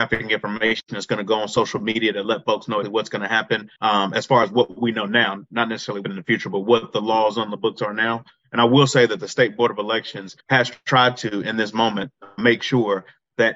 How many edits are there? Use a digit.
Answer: 5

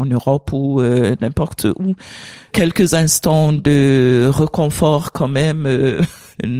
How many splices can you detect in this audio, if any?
0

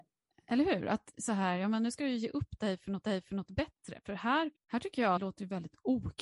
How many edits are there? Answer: 3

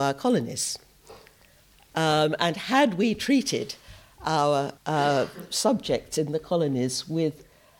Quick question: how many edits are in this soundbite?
1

